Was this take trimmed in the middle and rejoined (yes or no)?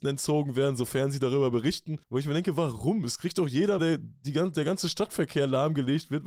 yes